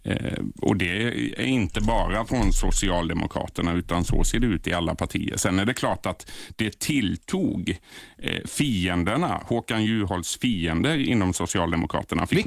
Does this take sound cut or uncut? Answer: uncut